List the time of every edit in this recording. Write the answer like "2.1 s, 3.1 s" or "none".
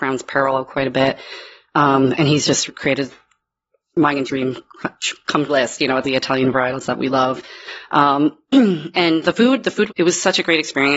2.7 s, 4.3 s, 5.5 s, 6.0 s, 9.2 s, 9.9 s

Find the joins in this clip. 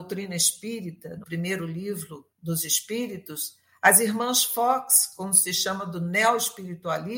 1.2 s, 2.3 s

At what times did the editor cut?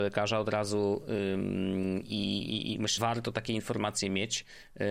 3.0 s

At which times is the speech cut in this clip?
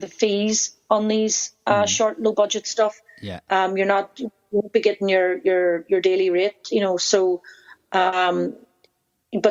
none

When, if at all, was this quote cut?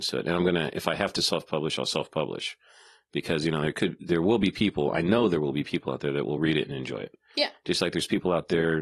none

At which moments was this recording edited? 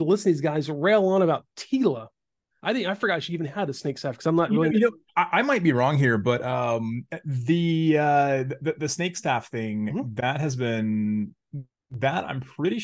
none

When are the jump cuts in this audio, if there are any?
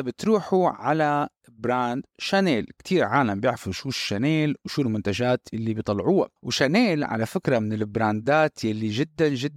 6.4 s

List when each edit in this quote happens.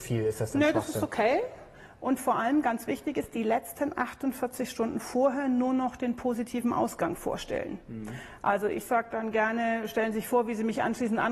none

